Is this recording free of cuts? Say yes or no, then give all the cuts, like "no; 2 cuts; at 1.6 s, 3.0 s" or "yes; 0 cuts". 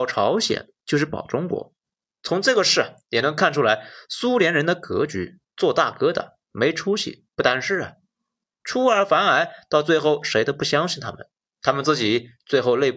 no; 1 cut; at 5.4 s